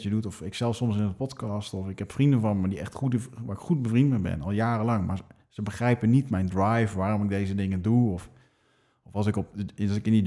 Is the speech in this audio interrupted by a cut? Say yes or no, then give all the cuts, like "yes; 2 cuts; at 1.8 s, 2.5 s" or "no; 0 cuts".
no; 0 cuts